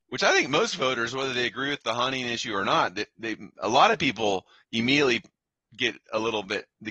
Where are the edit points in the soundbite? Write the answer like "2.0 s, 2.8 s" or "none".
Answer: none